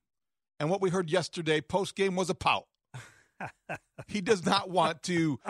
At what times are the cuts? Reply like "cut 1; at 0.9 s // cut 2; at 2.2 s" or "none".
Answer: none

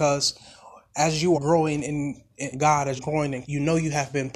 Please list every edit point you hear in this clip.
cut 1; at 1.3 s // cut 2; at 2.5 s // cut 3; at 3.0 s // cut 4; at 3.4 s

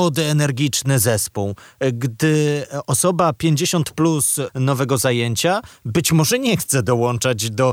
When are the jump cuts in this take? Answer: cut 1; at 4.5 s

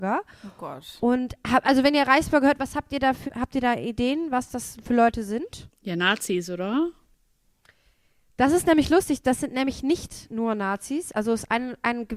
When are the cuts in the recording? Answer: cut 1; at 3.3 s

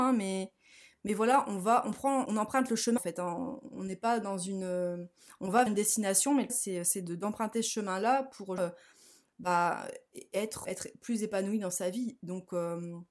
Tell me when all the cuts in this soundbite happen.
cut 1; at 2.3 s // cut 2; at 3.0 s // cut 3; at 5.7 s // cut 4; at 6.5 s // cut 5; at 8.6 s // cut 6; at 10.6 s

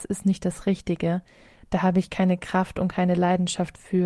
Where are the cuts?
none

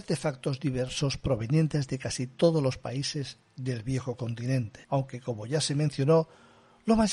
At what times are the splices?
cut 1; at 4.8 s

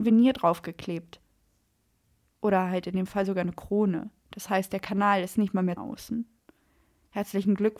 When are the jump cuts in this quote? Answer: cut 1; at 5.8 s

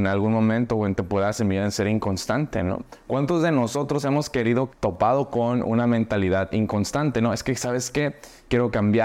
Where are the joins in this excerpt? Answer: cut 1; at 4.7 s

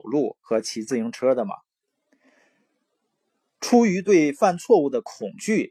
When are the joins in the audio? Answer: none

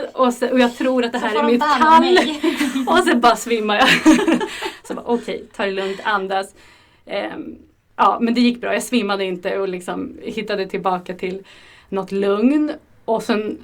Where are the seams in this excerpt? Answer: none

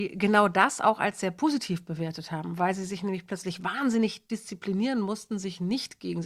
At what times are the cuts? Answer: none

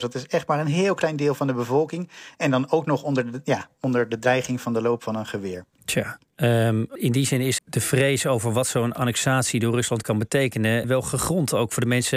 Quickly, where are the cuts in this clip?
cut 1; at 7.0 s // cut 2; at 7.6 s // cut 3; at 10.8 s

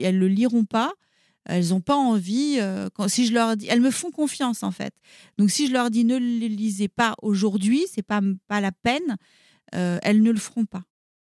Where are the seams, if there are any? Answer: none

